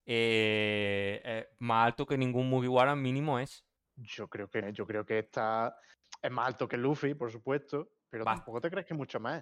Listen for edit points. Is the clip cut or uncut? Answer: cut